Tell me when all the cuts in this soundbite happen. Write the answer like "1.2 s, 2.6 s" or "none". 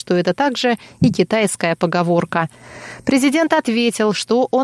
none